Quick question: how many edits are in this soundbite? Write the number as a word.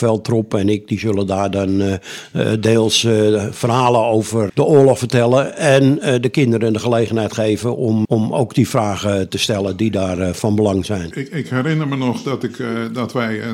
two